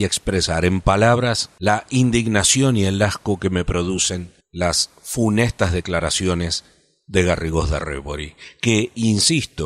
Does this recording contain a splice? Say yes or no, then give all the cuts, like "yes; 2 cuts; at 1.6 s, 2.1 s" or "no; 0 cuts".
no; 0 cuts